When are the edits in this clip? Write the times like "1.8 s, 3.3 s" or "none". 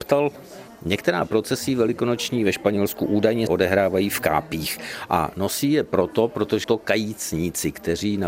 3.5 s, 6.6 s